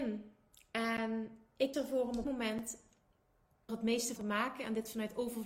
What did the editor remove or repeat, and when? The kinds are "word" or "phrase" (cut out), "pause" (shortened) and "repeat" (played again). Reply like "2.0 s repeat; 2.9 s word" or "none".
1.7 s word; 2.2 s word; 3.7 s word; 4.2 s word